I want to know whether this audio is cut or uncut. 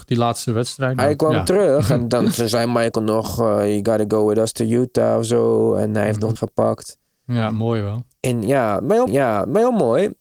cut